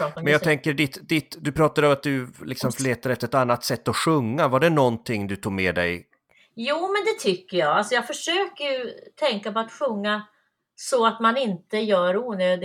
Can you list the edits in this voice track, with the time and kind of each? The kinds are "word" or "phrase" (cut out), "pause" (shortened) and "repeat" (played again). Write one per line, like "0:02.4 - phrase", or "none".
none